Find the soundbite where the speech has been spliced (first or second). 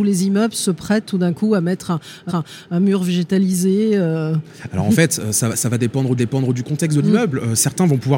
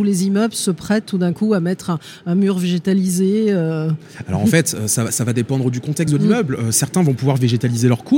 first